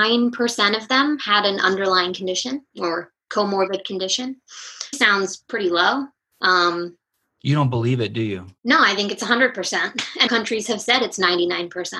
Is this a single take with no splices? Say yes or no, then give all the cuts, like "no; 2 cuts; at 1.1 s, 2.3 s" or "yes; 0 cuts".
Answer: no; 4 cuts; at 2.7 s, 4.9 s, 8.6 s, 10.3 s